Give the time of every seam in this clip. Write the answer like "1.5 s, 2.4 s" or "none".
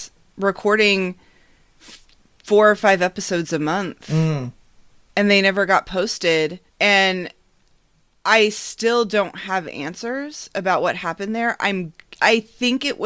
6.7 s